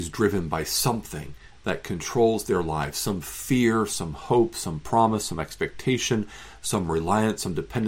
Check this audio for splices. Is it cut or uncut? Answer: uncut